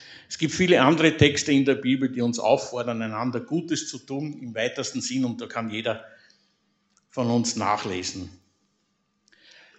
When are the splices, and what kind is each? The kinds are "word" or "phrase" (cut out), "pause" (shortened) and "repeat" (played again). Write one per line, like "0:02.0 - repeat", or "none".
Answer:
none

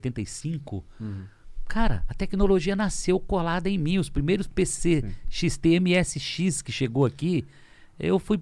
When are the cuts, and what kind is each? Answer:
none

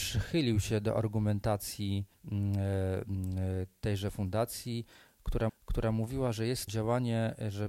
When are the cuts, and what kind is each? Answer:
0:02.1 - pause
0:05.5 - repeat
0:06.7 - word

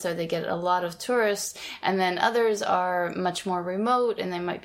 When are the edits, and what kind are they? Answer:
none

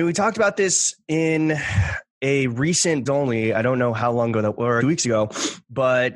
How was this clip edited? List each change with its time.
0:03.1 - word
0:04.8 - phrase

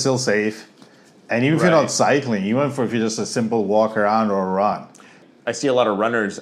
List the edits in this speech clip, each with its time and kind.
none

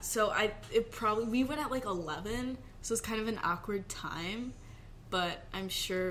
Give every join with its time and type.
none

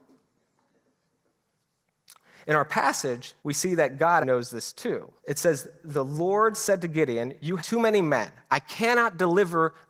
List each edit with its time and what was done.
0:03.4 - pause
0:04.2 - word
0:05.2 - pause
0:07.6 - word

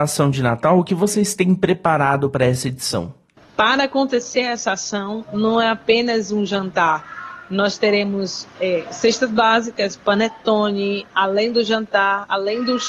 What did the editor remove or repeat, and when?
0:03.4 - pause

